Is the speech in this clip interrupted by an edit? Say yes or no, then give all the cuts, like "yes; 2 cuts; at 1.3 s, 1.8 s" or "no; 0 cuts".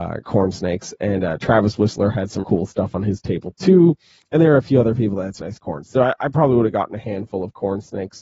yes; 2 cuts; at 2.4 s, 5.4 s